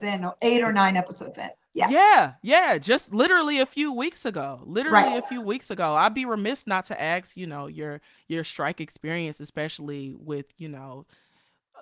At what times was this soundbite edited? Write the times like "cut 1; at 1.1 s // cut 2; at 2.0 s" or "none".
none